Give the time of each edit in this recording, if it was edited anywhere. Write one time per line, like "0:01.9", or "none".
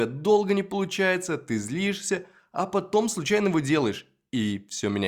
none